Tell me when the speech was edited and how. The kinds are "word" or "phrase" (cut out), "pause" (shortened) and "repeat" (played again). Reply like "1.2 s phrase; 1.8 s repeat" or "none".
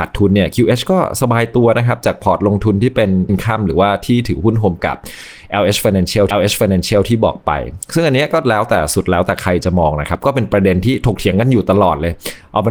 3.3 s word; 4.8 s word; 6.3 s repeat